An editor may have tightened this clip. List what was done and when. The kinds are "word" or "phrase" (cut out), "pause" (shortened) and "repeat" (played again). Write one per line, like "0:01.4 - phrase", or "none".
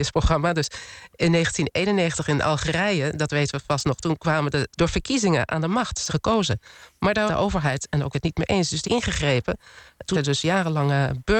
0:04.7 - word
0:06.1 - word
0:07.3 - word
0:08.1 - word
0:08.8 - word
0:10.1 - word